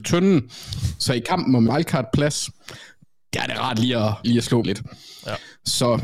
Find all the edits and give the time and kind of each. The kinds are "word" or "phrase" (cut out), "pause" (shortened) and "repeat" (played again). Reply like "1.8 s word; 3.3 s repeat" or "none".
1.7 s word; 4.2 s word; 4.6 s word